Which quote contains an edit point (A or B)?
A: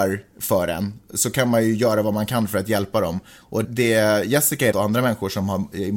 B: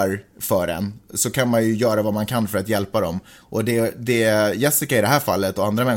A